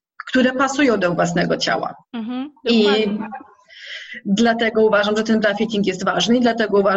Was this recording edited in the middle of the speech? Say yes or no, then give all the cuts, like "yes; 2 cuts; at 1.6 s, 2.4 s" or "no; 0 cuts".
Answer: yes; 1 cut; at 2.0 s